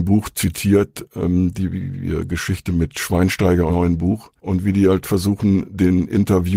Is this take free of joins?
no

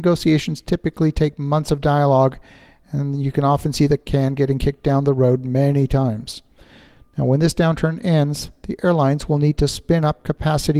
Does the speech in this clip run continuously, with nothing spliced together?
yes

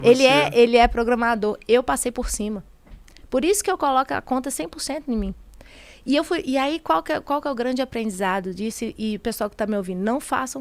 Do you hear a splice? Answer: no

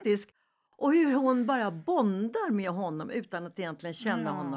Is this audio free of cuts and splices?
yes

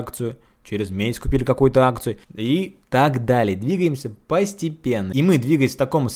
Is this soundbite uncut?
no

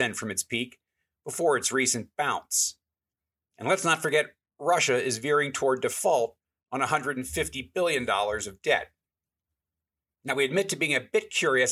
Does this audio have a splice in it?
no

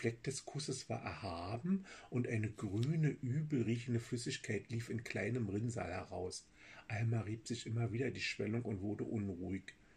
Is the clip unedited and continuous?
yes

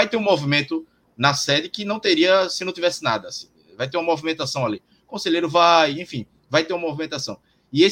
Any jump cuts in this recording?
no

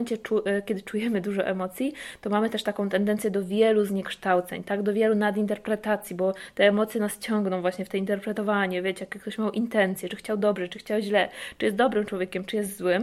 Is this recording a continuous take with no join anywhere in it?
yes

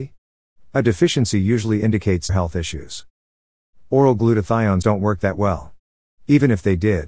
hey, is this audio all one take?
no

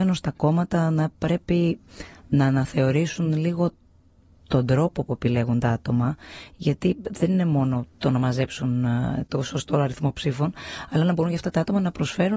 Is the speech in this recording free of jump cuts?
yes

